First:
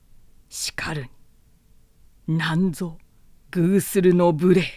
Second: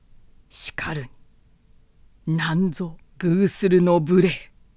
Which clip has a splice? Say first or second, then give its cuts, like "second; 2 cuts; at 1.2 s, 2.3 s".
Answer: second; 1 cut; at 3.1 s